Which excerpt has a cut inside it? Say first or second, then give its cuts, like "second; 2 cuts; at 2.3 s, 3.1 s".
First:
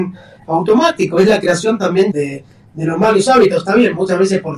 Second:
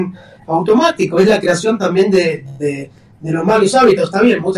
first; 1 cut; at 2.1 s